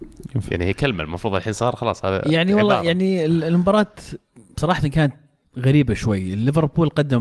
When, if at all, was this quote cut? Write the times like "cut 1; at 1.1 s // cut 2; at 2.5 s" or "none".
cut 1; at 5.4 s